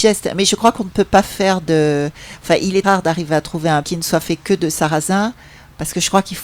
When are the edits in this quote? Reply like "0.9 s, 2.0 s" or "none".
2.8 s, 3.8 s